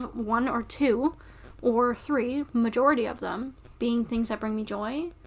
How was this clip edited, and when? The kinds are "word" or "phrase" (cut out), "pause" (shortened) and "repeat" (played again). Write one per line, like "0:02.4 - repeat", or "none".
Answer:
0:03.7 - pause